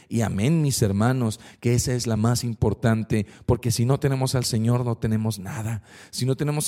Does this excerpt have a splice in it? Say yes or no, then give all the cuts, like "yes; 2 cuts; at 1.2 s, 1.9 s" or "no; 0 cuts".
no; 0 cuts